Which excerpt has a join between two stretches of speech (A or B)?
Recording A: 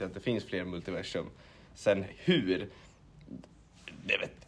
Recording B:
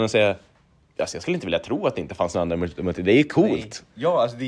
A